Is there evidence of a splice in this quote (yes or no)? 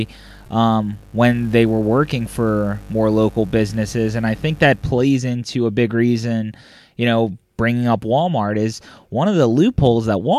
no